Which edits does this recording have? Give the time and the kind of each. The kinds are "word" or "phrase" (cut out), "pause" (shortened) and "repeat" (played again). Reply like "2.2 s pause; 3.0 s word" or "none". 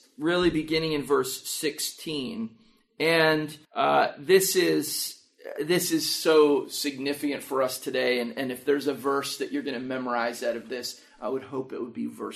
3.6 s pause; 5.6 s word